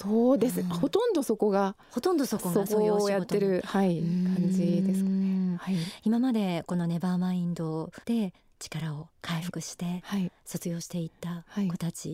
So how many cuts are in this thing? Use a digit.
2